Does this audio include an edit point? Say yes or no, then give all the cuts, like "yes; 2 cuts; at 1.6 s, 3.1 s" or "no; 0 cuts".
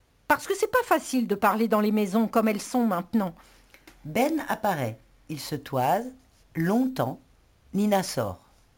no; 0 cuts